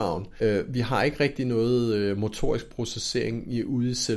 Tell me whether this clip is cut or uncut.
uncut